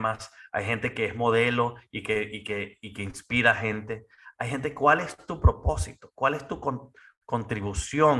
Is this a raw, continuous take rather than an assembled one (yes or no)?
yes